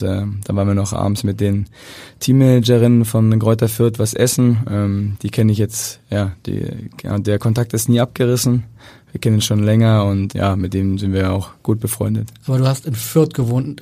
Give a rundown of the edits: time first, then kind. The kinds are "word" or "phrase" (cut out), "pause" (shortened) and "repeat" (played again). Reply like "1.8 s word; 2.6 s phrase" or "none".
10.3 s word